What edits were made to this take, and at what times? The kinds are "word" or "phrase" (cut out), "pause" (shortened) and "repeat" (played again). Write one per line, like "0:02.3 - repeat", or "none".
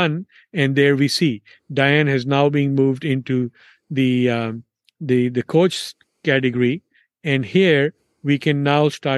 none